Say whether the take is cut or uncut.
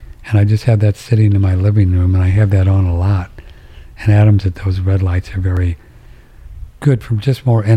cut